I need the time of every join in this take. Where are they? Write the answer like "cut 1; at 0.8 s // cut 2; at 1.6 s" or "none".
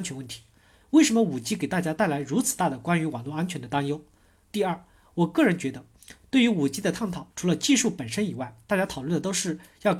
none